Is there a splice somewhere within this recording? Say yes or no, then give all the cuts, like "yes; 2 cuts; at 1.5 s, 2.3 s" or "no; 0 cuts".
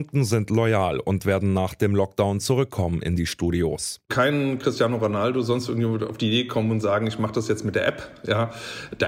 no; 0 cuts